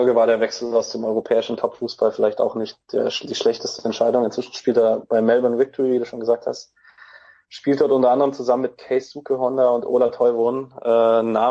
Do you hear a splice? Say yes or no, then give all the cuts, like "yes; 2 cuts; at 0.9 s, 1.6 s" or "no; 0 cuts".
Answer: no; 0 cuts